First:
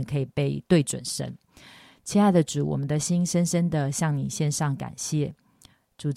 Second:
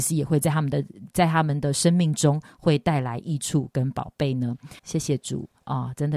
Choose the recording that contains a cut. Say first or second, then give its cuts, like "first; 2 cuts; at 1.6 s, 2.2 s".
second; 1 cut; at 4.8 s